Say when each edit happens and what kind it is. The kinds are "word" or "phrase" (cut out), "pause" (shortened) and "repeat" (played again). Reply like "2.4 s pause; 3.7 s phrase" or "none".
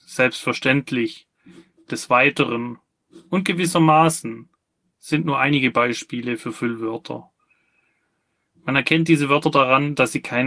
none